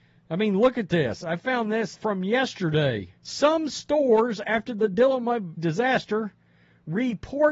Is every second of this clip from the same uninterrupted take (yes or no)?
no